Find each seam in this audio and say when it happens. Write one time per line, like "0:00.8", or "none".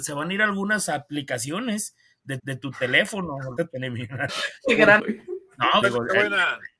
0:02.4
0:03.6
0:04.3
0:05.0
0:05.8